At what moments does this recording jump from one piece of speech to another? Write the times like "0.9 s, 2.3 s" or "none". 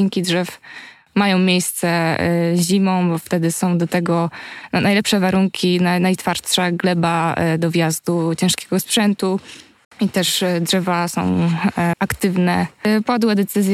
9.8 s, 11.9 s